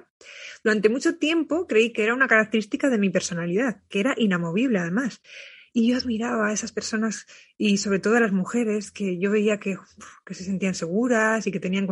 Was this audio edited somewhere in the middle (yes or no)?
no